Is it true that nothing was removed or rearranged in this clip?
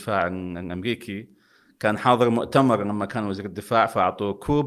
yes; 0 cuts

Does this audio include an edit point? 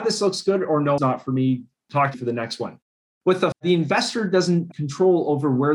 yes; 4 cuts; at 1.0 s, 2.1 s, 3.5 s, 4.7 s

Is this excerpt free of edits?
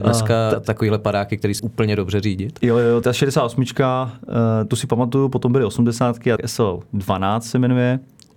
no; 3 cuts; at 1.6 s, 3.0 s, 6.4 s

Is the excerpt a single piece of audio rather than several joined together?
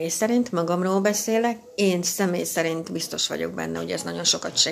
yes; 0 cuts

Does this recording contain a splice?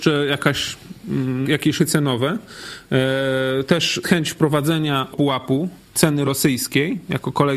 yes; 5 cuts; at 1.4 s, 1.8 s, 4.0 s, 5.1 s, 6.2 s

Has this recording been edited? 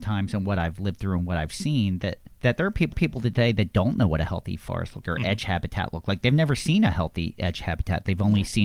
yes; 3 cuts; at 2.3 s, 2.9 s, 5.0 s

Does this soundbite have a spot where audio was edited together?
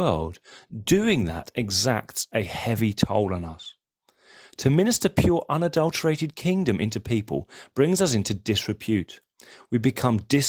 no; 0 cuts

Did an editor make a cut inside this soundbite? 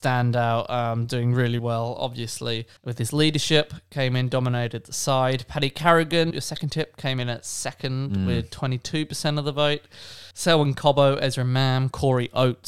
yes; 4 cuts; at 1.6 s, 2.8 s, 6.3 s, 10.3 s

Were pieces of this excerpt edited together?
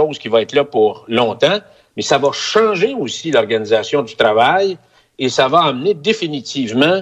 no; 0 cuts

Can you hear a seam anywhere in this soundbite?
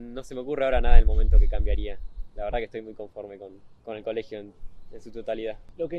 no; 0 cuts

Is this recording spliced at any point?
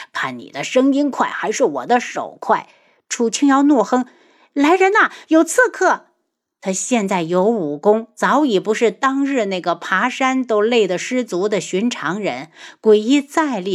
no; 0 cuts

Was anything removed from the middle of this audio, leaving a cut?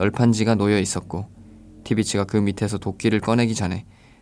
no; 0 cuts

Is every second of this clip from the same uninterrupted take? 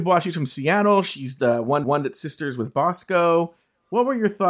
no; 1 cut; at 1.8 s

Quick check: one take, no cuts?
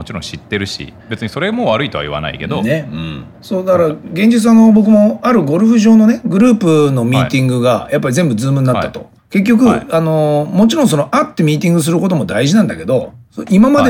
no; 3 cuts; at 1.0 s, 3.3 s, 9.2 s

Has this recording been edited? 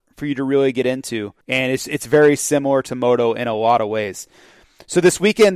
yes; 1 cut; at 1.4 s

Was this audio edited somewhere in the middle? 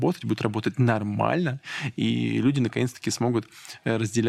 no; 0 cuts

